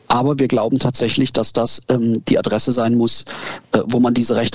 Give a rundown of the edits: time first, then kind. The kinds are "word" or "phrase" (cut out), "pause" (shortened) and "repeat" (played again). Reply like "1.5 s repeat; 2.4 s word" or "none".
none